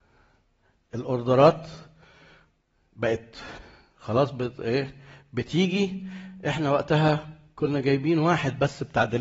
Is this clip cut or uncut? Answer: uncut